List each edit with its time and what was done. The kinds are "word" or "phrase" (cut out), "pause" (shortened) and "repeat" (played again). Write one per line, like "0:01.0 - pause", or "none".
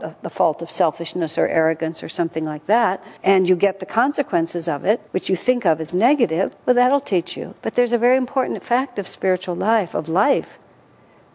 0:03.2 - pause
0:05.1 - pause
0:06.6 - pause
0:07.6 - pause